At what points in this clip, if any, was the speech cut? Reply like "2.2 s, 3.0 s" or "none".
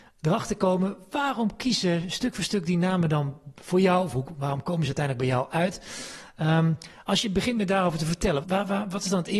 8.4 s